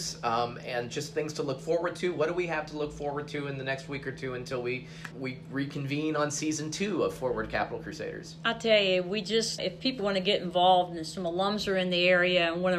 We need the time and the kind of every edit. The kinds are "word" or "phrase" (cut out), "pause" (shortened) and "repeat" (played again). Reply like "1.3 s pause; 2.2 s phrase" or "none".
5.1 s word; 9.6 s word; 10.0 s word